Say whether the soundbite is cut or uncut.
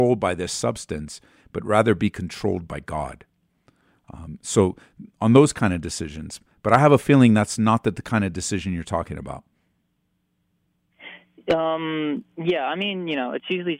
uncut